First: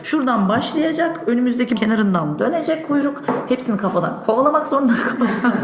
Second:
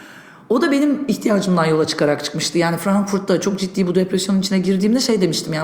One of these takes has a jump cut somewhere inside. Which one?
first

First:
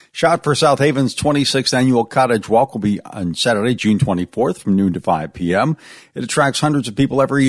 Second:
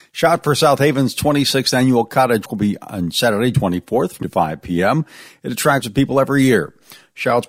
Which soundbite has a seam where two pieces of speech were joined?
second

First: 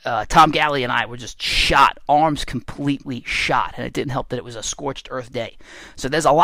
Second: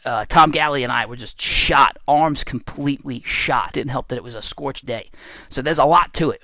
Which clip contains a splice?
second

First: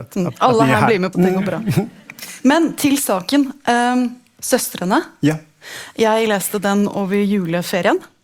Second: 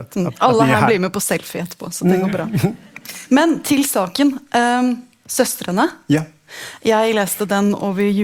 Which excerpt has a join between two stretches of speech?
first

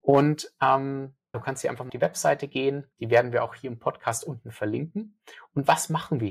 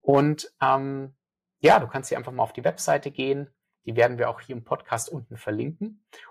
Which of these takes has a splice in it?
first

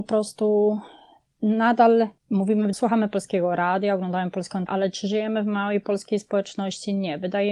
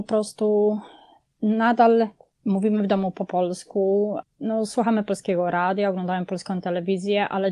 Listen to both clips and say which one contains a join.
first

